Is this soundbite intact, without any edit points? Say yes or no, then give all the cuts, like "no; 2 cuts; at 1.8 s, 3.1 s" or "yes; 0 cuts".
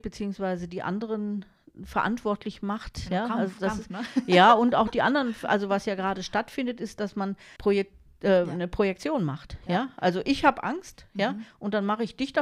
no; 1 cut; at 7.6 s